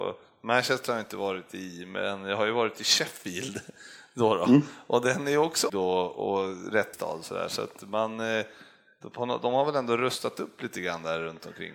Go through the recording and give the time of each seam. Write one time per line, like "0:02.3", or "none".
0:05.7
0:06.9